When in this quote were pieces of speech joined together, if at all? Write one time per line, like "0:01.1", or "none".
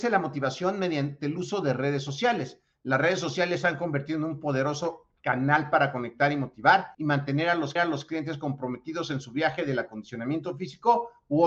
0:06.9
0:07.8